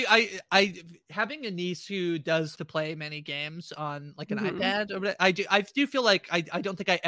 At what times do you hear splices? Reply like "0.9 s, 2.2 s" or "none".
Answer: 2.5 s